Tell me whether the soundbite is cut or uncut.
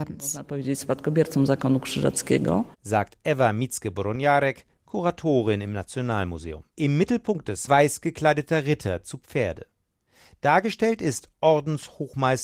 cut